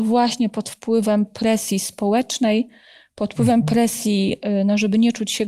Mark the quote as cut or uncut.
uncut